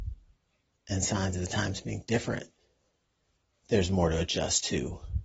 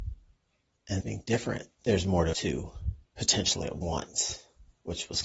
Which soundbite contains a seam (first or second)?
second